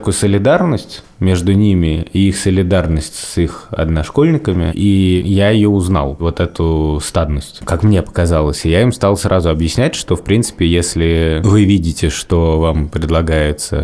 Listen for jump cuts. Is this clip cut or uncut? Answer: uncut